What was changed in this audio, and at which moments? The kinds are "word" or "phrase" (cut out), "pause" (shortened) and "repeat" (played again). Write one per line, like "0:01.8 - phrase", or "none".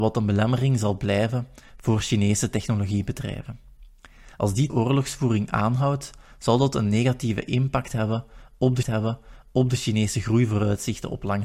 0:04.3 - pause
0:04.7 - word
0:08.8 - repeat